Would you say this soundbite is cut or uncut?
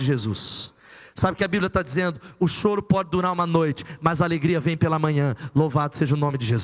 uncut